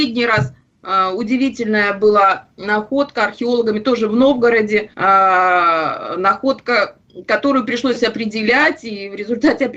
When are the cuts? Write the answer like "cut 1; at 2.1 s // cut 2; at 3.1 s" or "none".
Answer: cut 1; at 4.9 s